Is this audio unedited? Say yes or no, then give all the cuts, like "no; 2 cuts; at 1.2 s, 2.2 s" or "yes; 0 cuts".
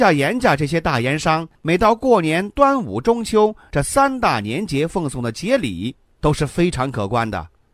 yes; 0 cuts